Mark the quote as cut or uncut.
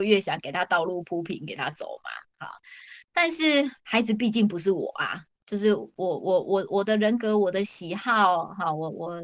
cut